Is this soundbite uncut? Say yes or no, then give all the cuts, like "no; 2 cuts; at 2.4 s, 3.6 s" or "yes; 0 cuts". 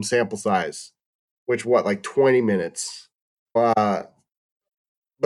no; 2 cuts; at 1.6 s, 3.6 s